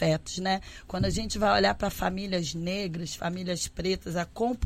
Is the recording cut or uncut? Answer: uncut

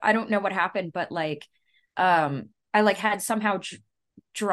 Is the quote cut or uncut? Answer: uncut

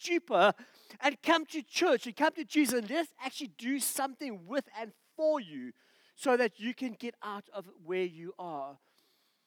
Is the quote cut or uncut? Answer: uncut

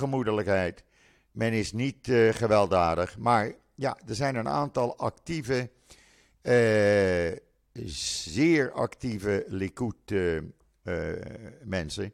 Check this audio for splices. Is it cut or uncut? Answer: uncut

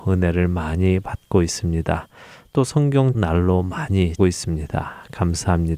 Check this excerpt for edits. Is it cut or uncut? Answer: cut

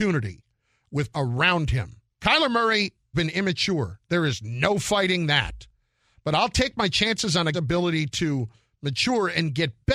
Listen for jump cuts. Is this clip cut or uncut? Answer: cut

